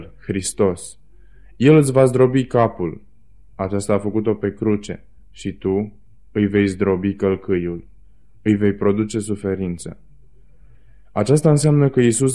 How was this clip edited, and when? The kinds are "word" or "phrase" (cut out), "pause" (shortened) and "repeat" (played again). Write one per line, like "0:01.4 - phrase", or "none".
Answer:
0:05.2 - pause